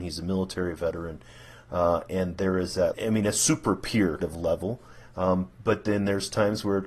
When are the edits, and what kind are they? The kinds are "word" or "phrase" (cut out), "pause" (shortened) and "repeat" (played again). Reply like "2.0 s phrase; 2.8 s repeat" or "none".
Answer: 2.9 s word; 4.2 s word